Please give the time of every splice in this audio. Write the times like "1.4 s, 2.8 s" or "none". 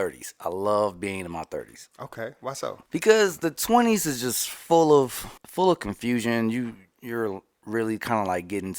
1.9 s, 2.9 s, 5.4 s, 7.5 s